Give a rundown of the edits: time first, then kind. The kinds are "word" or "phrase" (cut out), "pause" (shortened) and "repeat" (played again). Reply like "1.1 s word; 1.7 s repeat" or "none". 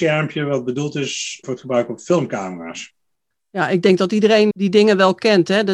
1.4 s word; 4.5 s word